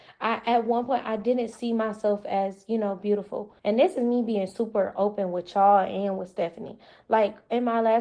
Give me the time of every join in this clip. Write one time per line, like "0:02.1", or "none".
0:03.6